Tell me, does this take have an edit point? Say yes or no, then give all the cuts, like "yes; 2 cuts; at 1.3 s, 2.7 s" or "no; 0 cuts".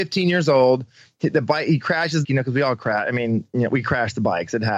yes; 1 cut; at 2.2 s